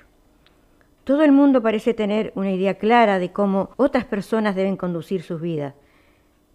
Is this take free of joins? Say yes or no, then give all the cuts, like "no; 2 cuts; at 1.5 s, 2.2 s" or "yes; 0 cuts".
no; 1 cut; at 3.7 s